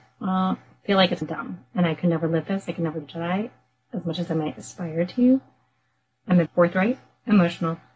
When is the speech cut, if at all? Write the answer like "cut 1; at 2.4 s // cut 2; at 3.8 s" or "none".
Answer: cut 1; at 1.2 s // cut 2; at 2.5 s // cut 3; at 3.0 s // cut 4; at 6.5 s

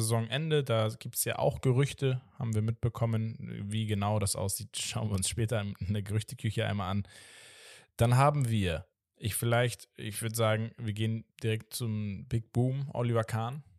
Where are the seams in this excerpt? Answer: cut 1; at 8.9 s // cut 2; at 11.3 s

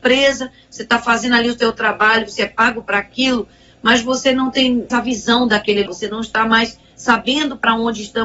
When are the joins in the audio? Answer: cut 1; at 4.9 s // cut 2; at 5.9 s

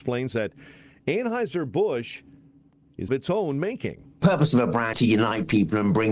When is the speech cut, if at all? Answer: cut 1; at 3.1 s // cut 2; at 4.9 s

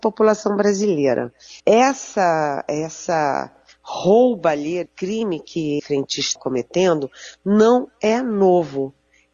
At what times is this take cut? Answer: cut 1; at 1.6 s // cut 2; at 4.9 s // cut 3; at 5.8 s // cut 4; at 6.4 s

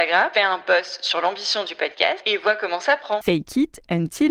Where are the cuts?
none

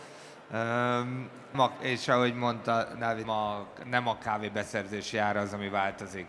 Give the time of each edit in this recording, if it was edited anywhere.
cut 1; at 1.5 s // cut 2; at 3.2 s

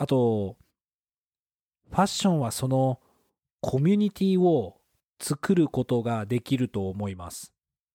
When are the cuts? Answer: none

